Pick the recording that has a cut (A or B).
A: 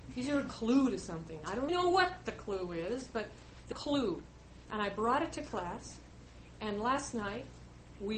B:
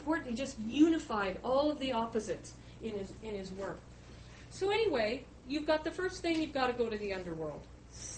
A